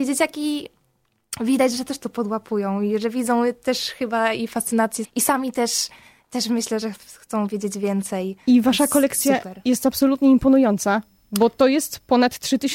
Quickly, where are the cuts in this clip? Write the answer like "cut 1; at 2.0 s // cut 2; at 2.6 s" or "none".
cut 1; at 5.0 s